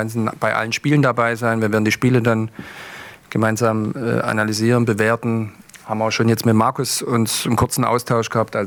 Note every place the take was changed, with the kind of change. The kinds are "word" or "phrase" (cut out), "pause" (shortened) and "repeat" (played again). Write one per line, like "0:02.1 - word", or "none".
none